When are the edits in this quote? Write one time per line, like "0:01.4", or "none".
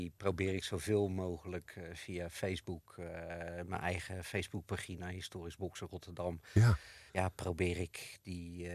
0:07.1